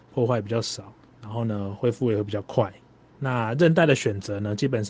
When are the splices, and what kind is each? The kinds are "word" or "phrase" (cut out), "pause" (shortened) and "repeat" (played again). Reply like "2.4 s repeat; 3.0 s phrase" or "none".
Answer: none